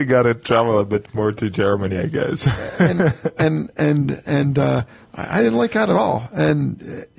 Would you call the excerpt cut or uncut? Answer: uncut